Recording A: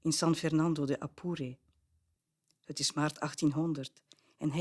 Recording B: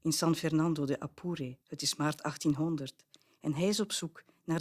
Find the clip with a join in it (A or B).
B